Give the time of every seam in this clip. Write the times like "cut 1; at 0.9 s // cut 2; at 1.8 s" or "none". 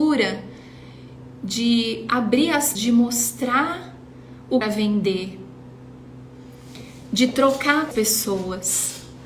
cut 1; at 2.7 s // cut 2; at 4.6 s // cut 3; at 7.9 s